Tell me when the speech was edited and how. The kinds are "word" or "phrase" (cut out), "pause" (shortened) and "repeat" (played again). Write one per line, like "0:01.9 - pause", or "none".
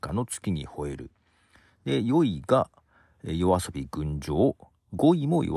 none